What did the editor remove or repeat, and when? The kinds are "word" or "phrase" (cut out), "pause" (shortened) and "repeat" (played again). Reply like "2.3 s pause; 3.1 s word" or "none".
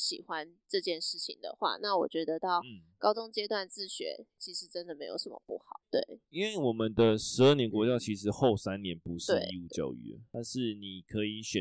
5.8 s pause; 6.2 s pause